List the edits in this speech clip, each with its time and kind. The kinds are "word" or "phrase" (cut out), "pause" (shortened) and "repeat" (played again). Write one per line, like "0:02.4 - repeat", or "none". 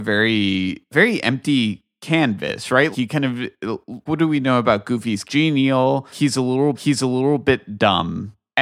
0:02.9 - word
0:04.1 - word
0:05.2 - phrase
0:06.7 - repeat

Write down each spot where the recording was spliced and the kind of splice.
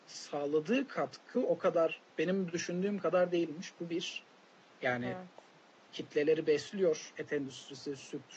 none

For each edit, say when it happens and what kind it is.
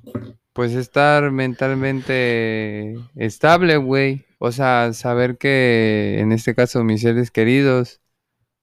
0:04.3 - pause

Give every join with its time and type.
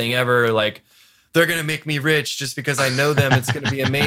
none

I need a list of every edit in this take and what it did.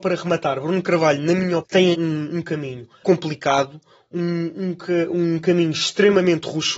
0:01.6 - word
0:01.9 - phrase
0:03.0 - word

